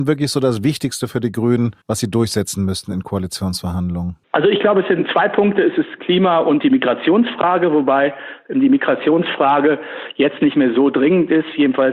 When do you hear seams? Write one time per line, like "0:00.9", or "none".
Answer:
0:01.8
0:04.2